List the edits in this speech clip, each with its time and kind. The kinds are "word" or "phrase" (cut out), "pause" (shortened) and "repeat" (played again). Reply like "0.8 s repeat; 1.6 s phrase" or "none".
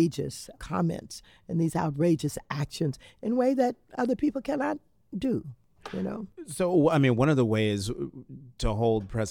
none

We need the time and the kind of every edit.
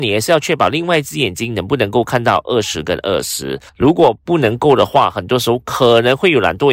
3.7 s pause

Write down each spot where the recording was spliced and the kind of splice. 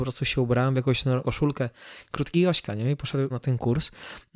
1.2 s word; 2.3 s word; 3.3 s word

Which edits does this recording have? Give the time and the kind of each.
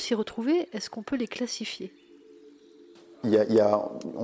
none

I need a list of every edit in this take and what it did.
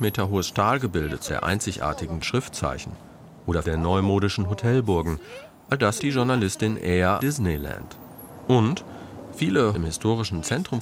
1.3 s word; 2.2 s word; 3.6 s word; 6.0 s word; 7.2 s word; 9.7 s word

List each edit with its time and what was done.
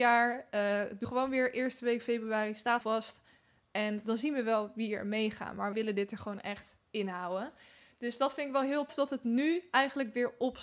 1.0 s word; 2.8 s word; 5.7 s word; 8.9 s word

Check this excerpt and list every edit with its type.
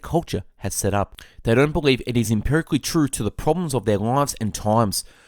none

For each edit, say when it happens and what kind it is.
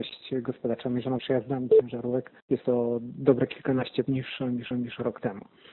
1.2 s word; 2.4 s pause; 4.0 s word; 4.7 s repeat

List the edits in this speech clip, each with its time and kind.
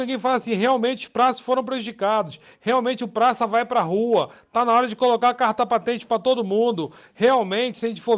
none

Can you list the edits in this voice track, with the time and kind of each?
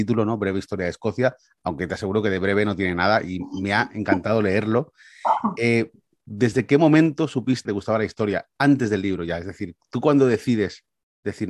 7.7 s word

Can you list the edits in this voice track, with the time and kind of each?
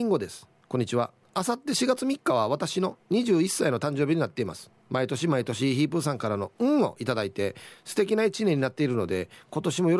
1.2 s pause; 3.0 s pause; 4.8 s pause

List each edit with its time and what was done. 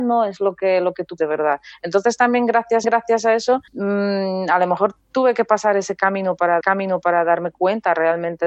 1.2 s word; 2.8 s repeat; 3.7 s pause; 6.6 s repeat

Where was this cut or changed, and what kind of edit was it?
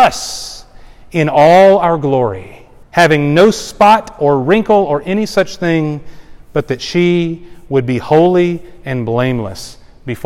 2.8 s pause

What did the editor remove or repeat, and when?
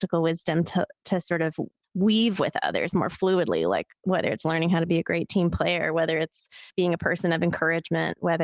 6.7 s pause

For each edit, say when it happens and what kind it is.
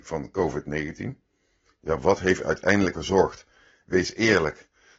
2.0 s word; 2.9 s word

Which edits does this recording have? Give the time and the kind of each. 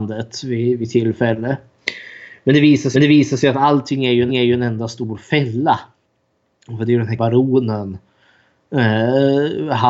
2.9 s repeat; 4.3 s repeat; 7.2 s word

